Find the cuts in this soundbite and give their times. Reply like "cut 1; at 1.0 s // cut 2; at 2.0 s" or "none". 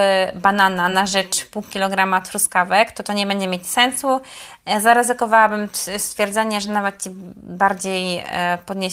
none